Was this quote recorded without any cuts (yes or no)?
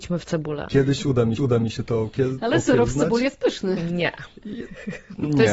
no